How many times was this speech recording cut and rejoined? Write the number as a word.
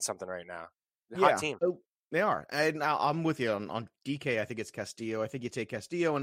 zero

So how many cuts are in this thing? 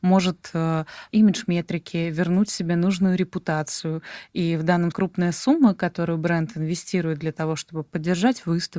two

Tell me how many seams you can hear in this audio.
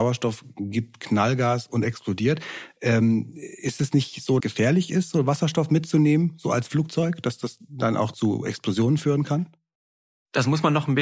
one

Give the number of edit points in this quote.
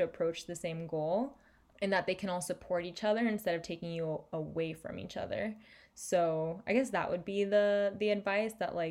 zero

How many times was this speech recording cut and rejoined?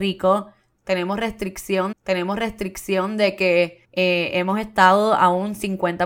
two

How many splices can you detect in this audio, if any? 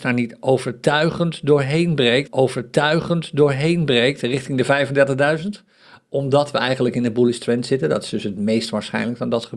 one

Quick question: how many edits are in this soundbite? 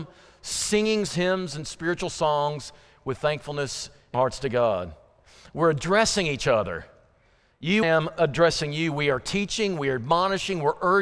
three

